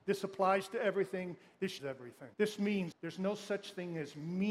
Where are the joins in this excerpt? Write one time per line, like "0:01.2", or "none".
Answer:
0:01.8
0:02.3
0:02.9